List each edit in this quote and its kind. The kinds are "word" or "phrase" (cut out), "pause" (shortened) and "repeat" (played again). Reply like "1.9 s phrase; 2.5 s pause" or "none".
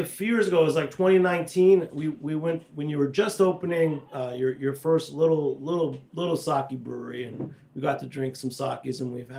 6.1 s pause